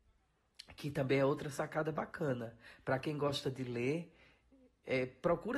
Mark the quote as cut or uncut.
uncut